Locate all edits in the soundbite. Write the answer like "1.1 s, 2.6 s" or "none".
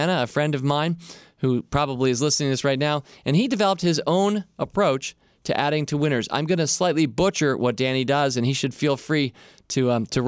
none